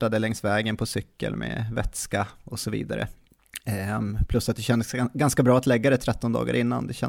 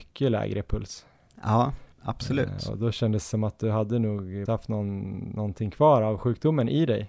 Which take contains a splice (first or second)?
second